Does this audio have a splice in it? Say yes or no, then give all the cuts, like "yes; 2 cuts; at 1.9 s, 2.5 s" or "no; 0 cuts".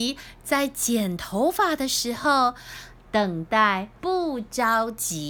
yes; 1 cut; at 4.0 s